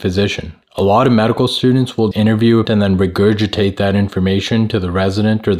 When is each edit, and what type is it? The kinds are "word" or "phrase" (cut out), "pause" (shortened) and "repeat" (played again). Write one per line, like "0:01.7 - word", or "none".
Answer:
0:02.1 - word
0:02.7 - word